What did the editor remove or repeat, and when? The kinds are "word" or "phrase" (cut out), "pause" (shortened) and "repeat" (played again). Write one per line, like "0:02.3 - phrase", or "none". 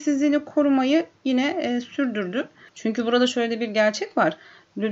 none